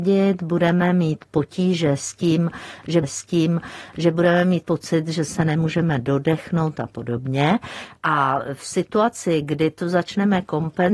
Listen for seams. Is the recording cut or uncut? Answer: cut